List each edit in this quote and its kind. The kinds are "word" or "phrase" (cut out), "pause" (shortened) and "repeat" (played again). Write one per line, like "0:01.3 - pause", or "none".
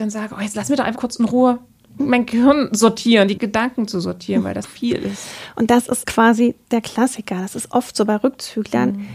0:00.9 - word
0:02.0 - word
0:04.6 - word